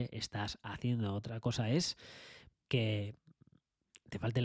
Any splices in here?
yes; 1 cut; at 2.5 s

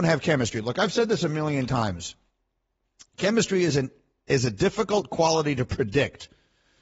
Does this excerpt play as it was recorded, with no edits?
yes; 0 cuts

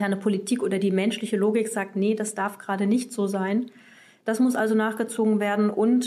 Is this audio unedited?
yes; 0 cuts

